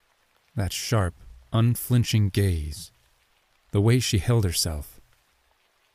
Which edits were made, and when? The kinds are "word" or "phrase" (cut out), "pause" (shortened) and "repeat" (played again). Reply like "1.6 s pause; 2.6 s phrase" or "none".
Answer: none